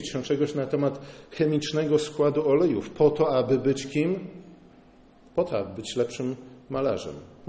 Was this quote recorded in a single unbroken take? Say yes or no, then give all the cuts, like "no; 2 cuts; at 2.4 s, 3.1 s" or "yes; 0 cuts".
yes; 0 cuts